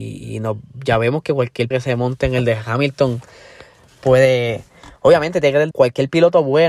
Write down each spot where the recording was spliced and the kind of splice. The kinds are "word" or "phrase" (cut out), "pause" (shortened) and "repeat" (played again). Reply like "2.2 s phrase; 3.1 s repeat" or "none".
1.7 s word; 5.0 s pause; 5.7 s phrase